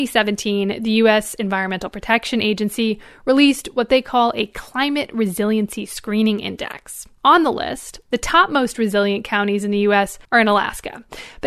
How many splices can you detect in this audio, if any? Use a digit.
1